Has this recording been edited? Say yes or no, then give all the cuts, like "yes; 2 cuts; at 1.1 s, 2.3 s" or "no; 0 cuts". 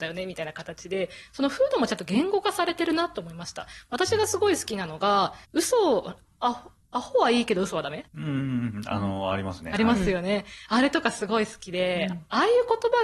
yes; 2 cuts; at 5.4 s, 8.1 s